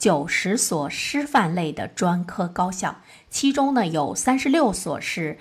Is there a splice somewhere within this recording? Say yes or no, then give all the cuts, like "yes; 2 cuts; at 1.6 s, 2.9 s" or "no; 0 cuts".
no; 0 cuts